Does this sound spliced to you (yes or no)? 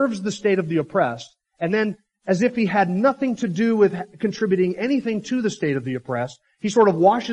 no